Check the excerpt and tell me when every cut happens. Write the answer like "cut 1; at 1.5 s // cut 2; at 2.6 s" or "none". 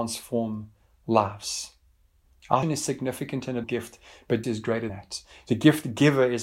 cut 1; at 2.6 s // cut 2; at 3.6 s // cut 3; at 4.4 s // cut 4; at 4.9 s